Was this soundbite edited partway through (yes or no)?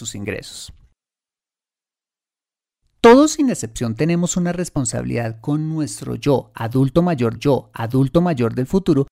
yes